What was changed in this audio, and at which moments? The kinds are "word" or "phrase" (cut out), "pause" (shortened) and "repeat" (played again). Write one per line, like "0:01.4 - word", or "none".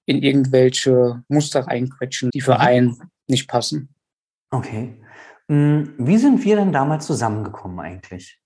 0:02.3 - word
0:03.2 - pause